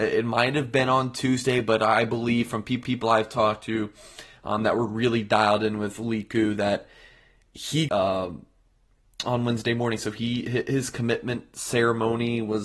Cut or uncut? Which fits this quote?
cut